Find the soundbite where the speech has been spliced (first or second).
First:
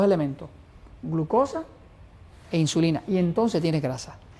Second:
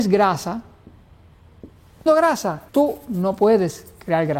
second